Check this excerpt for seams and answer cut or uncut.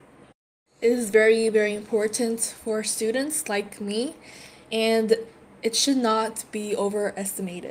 uncut